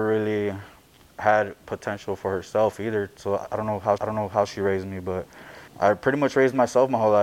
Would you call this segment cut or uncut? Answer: cut